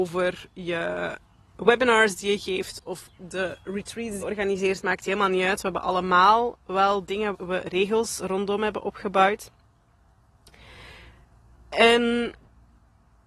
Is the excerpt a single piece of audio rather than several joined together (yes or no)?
no